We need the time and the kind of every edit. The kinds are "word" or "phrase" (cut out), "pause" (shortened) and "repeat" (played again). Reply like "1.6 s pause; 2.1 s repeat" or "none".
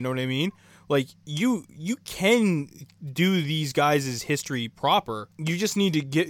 5.3 s pause